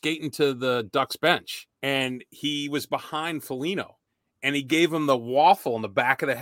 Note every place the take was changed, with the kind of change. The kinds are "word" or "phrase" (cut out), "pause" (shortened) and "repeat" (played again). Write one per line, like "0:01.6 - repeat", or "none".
0:01.7 - pause
0:04.1 - pause

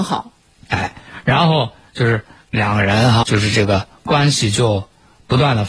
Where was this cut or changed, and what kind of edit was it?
0:03.2 - word

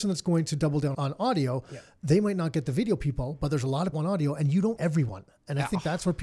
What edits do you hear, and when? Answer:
0:00.9 - word
0:03.9 - phrase
0:04.8 - word

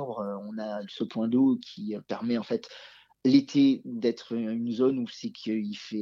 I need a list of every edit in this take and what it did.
none

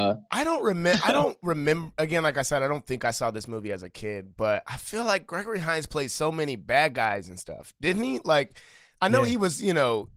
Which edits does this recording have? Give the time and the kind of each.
none

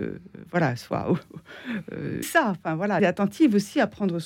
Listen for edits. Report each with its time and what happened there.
0:02.2 - word
0:03.0 - word

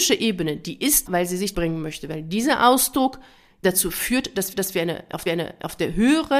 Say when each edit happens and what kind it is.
0:01.1 - word
0:01.5 - phrase
0:03.6 - word
0:04.5 - repeat
0:05.3 - repeat

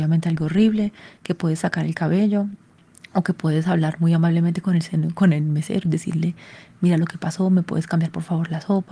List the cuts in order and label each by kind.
none

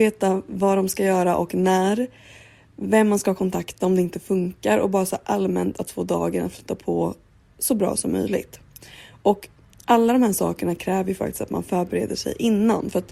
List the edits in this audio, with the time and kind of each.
none

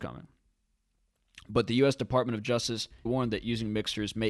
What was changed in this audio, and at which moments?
0:03.1 - phrase

